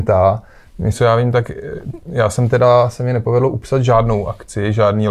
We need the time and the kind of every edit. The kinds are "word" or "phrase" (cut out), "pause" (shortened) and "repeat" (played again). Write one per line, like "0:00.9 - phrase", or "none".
0:00.9 - word